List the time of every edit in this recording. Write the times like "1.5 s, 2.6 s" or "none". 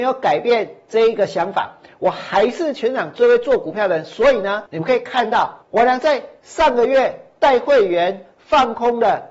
4.7 s, 5.6 s

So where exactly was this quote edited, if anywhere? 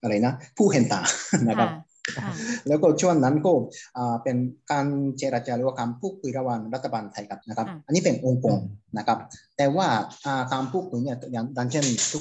7.4 s

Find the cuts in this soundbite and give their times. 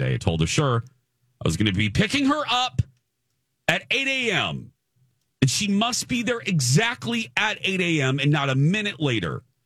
none

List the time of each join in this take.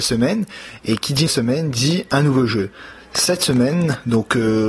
1.3 s

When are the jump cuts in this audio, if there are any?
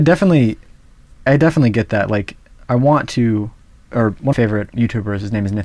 1.3 s, 4.3 s, 4.7 s

